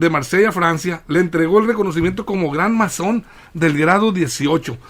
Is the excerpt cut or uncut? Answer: uncut